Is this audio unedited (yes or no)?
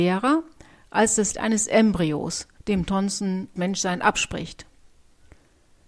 no